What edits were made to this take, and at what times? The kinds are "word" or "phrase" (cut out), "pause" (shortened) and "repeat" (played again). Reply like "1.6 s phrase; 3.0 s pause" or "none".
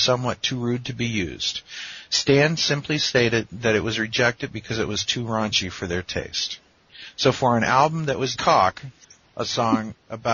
8.4 s word; 9.0 s pause